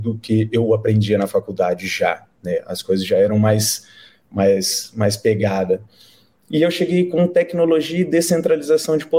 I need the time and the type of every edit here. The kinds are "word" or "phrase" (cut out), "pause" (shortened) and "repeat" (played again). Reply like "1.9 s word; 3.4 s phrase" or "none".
none